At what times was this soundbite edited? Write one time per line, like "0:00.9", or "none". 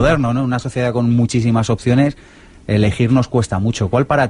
none